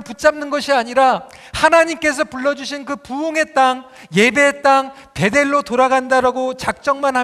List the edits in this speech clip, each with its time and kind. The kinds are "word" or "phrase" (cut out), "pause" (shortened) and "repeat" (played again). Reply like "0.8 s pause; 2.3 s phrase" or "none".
none